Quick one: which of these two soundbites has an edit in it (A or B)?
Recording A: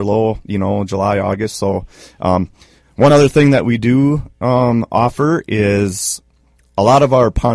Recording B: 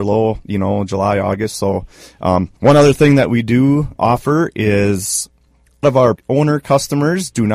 B